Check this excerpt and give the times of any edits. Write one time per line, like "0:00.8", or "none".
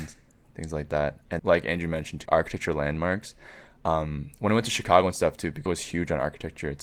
0:01.4
0:02.3
0:05.7